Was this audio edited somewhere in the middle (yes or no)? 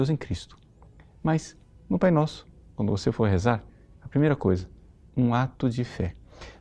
no